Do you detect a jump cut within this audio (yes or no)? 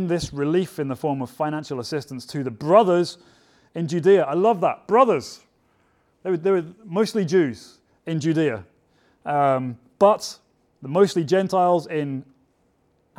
no